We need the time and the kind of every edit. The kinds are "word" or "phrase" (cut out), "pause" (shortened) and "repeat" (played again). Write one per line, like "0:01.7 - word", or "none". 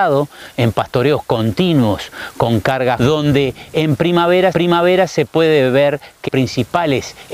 0:03.0 - word
0:04.5 - repeat
0:06.3 - word